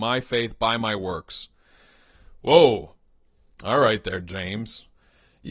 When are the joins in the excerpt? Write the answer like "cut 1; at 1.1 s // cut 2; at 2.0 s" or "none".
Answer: none